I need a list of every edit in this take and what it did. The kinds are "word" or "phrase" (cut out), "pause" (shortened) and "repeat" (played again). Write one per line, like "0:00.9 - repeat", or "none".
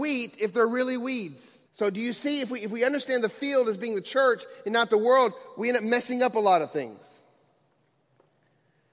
0:01.7 - pause